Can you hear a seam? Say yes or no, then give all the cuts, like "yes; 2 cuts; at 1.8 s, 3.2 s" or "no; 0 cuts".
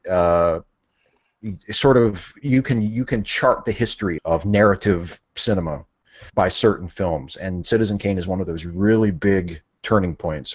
yes; 2 cuts; at 4.2 s, 6.3 s